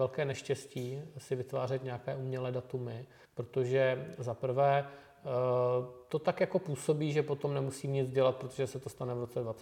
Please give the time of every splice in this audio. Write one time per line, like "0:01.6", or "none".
0:03.2